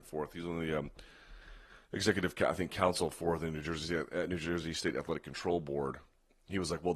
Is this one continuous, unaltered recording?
yes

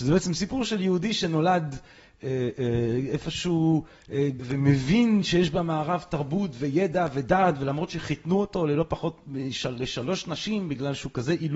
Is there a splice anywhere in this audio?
yes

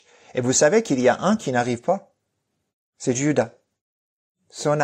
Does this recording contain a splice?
no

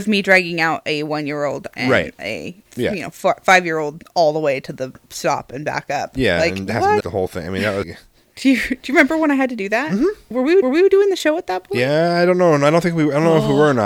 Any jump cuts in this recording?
yes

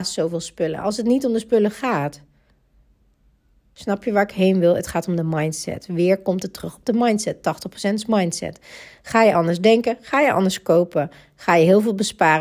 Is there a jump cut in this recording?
no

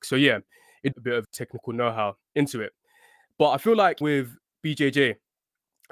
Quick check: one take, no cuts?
no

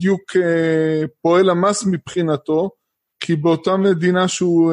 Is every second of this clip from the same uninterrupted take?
yes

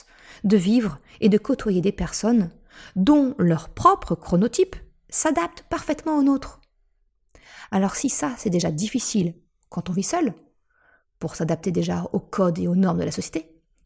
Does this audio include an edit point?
no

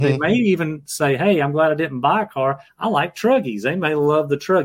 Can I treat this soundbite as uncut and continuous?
yes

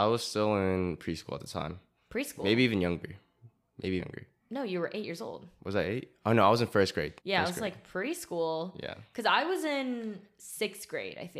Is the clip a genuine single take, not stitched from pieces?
no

